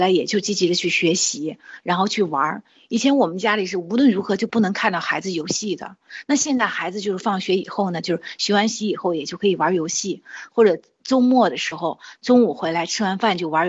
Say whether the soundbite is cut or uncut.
uncut